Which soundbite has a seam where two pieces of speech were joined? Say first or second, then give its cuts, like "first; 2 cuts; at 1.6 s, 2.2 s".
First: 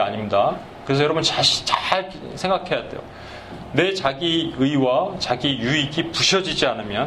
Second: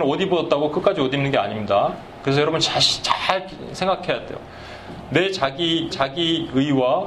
second; 1 cut; at 5.9 s